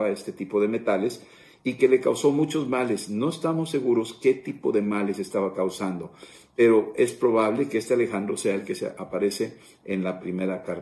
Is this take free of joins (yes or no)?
yes